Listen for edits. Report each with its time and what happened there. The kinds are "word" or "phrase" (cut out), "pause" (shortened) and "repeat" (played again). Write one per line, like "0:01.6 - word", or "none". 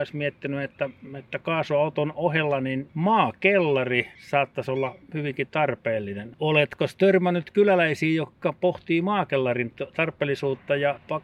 none